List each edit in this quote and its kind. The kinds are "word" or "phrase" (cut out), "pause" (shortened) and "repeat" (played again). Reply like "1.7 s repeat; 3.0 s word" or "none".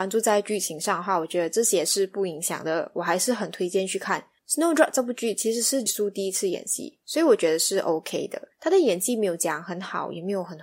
4.4 s pause; 5.9 s word; 8.5 s pause

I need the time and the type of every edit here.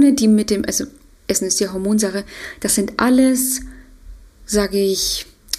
none

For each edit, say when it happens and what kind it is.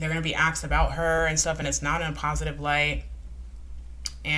none

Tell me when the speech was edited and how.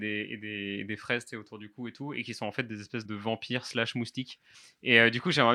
3.0 s word; 4.5 s pause

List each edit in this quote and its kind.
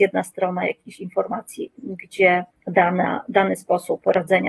2.5 s pause

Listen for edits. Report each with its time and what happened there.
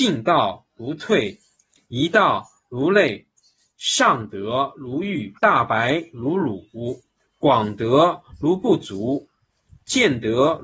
5.4 s pause

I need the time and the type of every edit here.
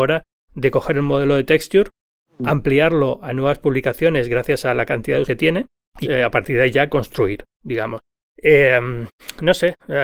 5.2 s word; 6.0 s word

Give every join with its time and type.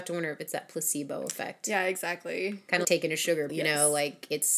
2.8 s word; 3.5 s word

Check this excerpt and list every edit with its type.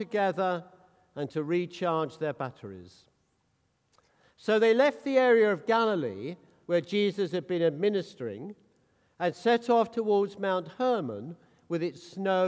none

